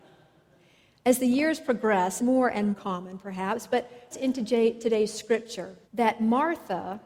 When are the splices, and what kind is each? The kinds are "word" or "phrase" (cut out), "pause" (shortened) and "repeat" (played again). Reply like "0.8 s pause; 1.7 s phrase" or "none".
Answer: 2.2 s word; 2.7 s word; 4.1 s word; 5.8 s pause